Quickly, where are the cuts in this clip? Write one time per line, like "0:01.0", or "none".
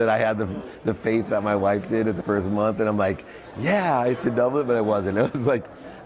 0:02.2